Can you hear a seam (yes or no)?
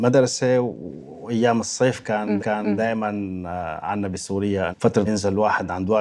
yes